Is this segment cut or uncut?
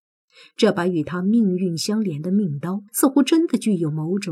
cut